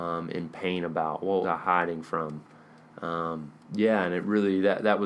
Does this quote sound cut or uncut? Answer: cut